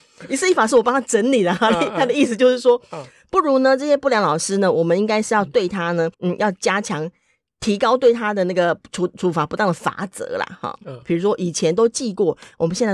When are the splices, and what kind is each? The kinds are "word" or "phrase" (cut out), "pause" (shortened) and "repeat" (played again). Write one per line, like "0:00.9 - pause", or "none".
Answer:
0:06.1 - pause